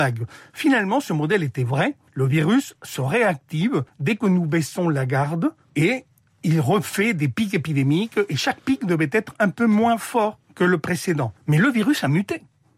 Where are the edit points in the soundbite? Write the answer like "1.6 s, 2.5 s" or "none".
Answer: 2.1 s, 3.9 s, 5.6 s, 10.4 s, 11.4 s